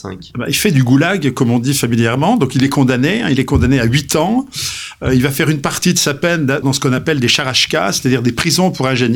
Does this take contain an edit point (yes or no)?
yes